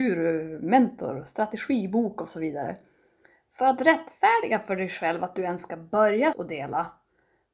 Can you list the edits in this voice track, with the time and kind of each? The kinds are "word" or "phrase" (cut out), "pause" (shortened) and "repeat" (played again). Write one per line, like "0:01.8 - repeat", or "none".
0:06.3 - word